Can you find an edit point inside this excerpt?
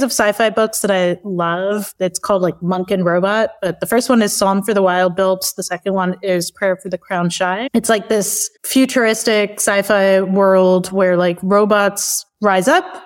no; 0 cuts

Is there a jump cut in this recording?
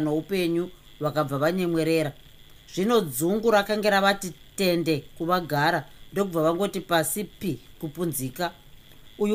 no; 0 cuts

